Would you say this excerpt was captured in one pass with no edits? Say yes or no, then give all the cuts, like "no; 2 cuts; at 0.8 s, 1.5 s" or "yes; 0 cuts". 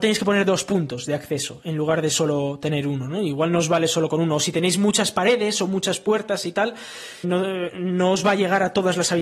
no; 1 cut; at 7.2 s